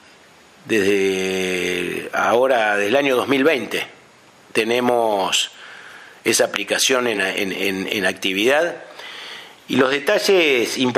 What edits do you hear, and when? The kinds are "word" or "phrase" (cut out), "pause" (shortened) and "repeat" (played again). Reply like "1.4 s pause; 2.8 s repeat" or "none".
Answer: none